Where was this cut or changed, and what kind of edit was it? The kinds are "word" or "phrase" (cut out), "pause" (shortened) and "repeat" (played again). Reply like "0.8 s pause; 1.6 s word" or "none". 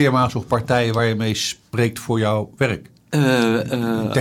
3.0 s pause